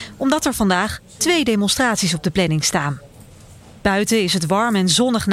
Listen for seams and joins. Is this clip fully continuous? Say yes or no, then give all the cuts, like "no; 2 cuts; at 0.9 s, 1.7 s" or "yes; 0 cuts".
yes; 0 cuts